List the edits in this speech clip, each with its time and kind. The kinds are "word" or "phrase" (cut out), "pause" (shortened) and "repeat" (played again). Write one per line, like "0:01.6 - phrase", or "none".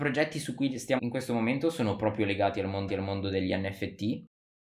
0:01.0 - word
0:02.9 - repeat